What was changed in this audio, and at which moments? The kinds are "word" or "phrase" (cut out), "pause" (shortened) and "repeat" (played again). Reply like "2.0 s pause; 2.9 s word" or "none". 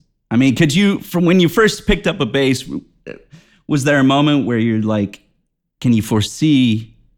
none